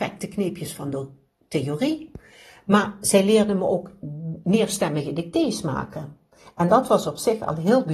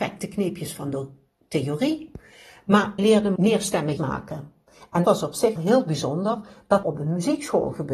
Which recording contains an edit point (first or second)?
second